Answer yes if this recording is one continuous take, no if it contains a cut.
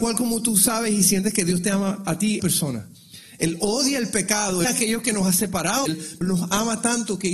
no